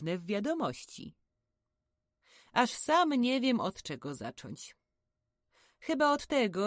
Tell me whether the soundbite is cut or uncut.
uncut